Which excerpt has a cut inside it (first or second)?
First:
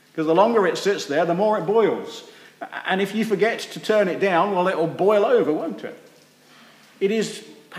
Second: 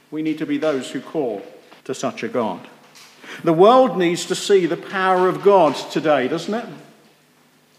second